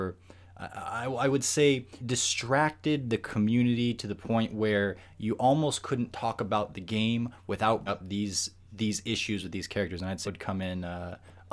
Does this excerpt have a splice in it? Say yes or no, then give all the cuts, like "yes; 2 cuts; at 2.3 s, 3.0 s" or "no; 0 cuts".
yes; 3 cuts; at 2.0 s, 7.9 s, 10.2 s